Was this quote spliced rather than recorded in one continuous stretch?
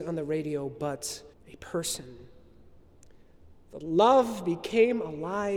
yes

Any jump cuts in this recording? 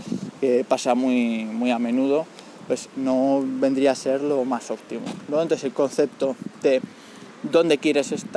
no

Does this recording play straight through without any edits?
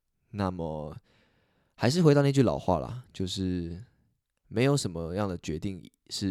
yes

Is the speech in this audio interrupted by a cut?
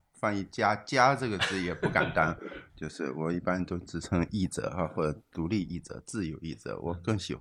yes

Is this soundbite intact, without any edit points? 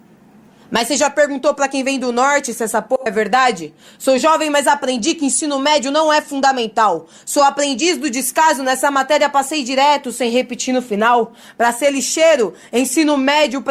yes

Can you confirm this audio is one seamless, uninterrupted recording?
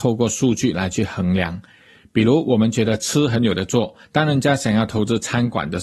yes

